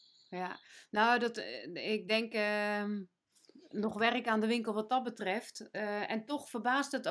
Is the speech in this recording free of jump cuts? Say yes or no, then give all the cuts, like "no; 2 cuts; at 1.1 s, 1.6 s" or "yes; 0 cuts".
yes; 0 cuts